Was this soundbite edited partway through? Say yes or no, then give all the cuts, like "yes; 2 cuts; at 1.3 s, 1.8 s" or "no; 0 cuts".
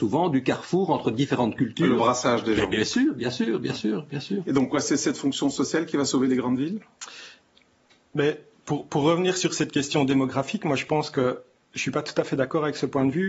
no; 0 cuts